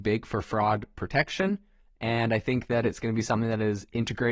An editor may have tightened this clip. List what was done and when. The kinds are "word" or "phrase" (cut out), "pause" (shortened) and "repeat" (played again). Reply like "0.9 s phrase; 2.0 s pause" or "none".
none

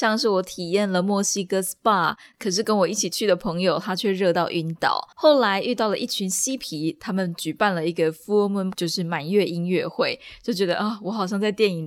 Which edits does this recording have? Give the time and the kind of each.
5.1 s pause; 8.7 s word

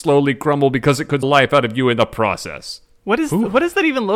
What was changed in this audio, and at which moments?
1.2 s phrase

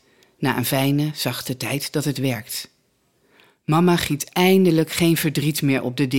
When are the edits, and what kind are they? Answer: none

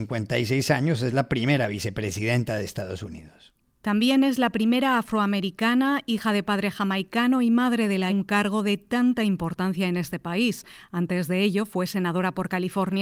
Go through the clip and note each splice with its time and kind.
3.6 s pause; 8.1 s phrase

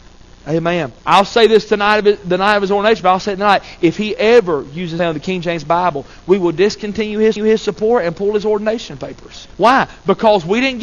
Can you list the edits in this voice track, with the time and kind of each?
1.0 s pause; 5.0 s word; 7.4 s repeat; 9.5 s pause

